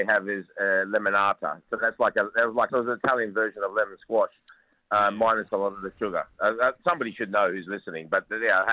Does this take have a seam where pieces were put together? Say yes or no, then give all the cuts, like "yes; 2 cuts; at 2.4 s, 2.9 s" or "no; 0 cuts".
yes; 1 cut; at 2.7 s